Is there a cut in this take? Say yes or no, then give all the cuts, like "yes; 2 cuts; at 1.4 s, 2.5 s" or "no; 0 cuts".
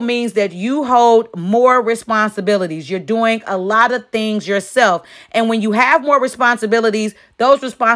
no; 0 cuts